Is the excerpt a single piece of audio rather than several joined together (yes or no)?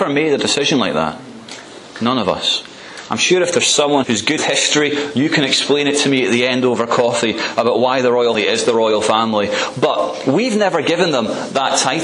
no